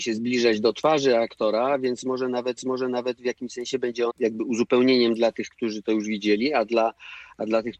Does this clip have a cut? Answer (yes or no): yes